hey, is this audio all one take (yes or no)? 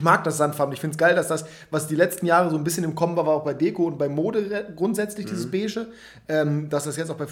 yes